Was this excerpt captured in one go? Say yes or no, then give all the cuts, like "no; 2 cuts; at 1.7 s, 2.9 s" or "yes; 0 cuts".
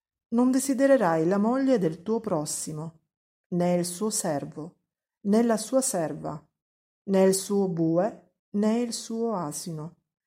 no; 1 cut; at 8.4 s